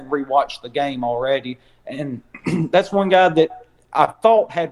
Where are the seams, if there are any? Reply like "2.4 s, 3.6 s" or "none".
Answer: none